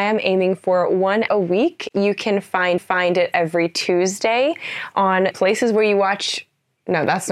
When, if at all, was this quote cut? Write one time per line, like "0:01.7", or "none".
0:01.3
0:02.8
0:05.3